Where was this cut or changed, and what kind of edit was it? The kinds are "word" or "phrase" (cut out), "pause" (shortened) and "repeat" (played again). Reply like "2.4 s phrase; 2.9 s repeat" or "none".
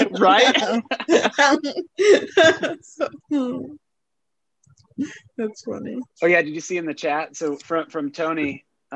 1.9 s pause; 3.2 s pause; 6.1 s pause